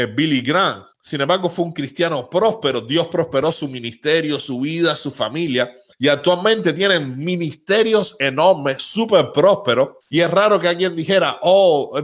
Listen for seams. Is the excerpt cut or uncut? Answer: cut